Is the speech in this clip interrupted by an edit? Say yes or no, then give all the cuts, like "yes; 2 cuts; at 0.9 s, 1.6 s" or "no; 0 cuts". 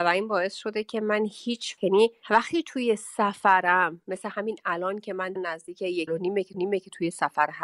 yes; 4 cuts; at 1.8 s, 5.4 s, 6.1 s, 6.5 s